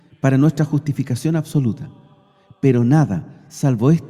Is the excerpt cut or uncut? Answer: uncut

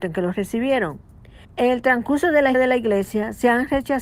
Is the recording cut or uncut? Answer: cut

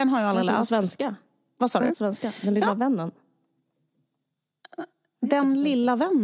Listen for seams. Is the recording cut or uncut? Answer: cut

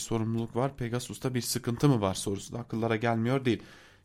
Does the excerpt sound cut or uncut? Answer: uncut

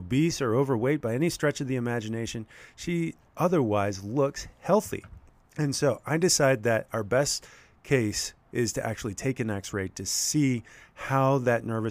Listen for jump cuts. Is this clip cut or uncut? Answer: cut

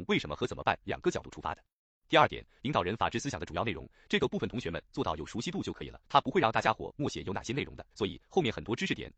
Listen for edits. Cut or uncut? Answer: cut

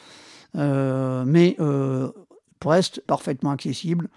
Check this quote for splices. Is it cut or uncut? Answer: cut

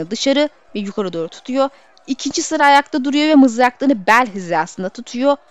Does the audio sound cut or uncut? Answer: uncut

